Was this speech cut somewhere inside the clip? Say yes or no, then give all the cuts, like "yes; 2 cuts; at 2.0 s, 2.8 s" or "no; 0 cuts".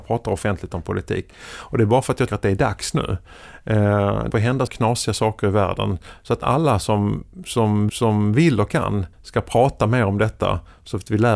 yes; 5 cuts; at 2.3 s, 4.3 s, 4.7 s, 7.9 s, 9.1 s